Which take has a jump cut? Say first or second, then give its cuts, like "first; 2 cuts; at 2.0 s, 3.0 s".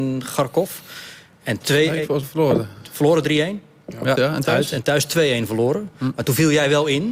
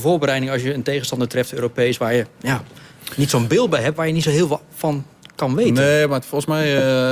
first; 3 cuts; at 1.6 s, 2.2 s, 4.1 s